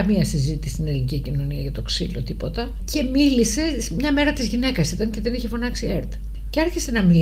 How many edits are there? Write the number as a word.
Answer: zero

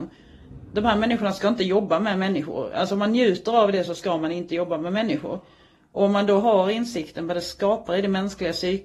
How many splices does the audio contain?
zero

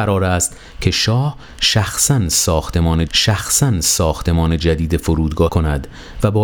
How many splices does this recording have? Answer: two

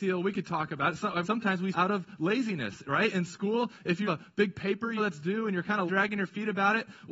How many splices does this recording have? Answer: five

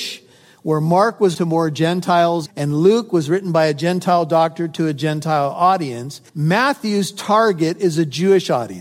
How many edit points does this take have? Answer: three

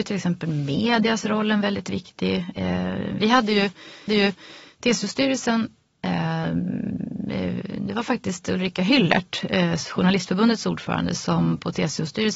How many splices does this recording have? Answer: one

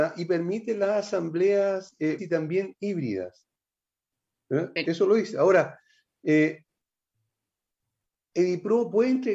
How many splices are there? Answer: one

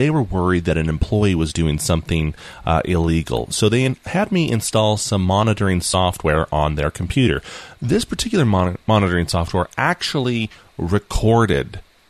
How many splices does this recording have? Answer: zero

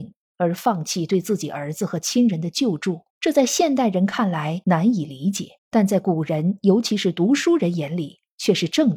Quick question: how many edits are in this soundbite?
two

